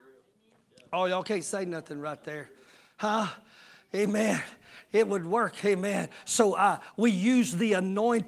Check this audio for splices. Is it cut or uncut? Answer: uncut